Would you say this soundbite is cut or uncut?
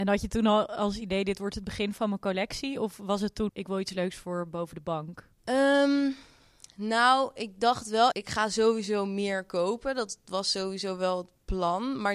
cut